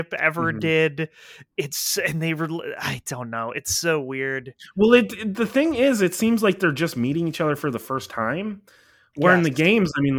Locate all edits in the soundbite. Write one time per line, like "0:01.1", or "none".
none